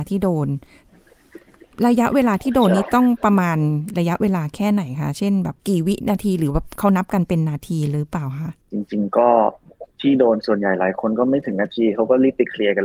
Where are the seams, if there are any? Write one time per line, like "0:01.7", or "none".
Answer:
0:05.6
0:08.6
0:09.9